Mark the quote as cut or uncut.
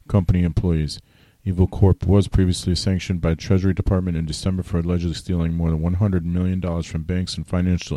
uncut